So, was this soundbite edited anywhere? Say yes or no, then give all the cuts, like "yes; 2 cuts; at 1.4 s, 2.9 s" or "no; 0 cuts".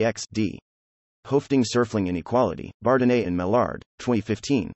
yes; 1 cut; at 2.7 s